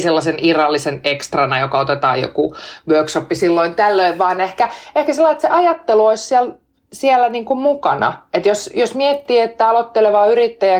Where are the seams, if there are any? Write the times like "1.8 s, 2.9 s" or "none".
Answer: none